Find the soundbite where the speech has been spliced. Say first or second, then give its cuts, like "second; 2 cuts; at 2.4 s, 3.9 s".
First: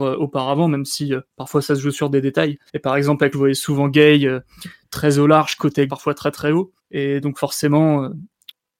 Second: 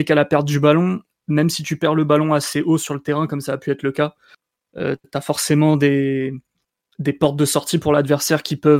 first; 5 cuts; at 1.3 s, 2.7 s, 3.3 s, 5.9 s, 6.8 s